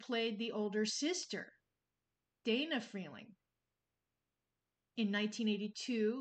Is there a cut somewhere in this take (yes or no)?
no